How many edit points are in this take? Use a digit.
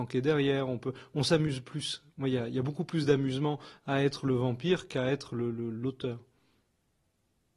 0